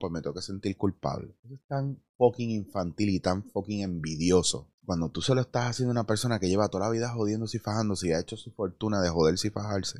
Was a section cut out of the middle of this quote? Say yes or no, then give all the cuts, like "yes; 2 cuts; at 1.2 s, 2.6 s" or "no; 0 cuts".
yes; 2 cuts; at 1.4 s, 4.7 s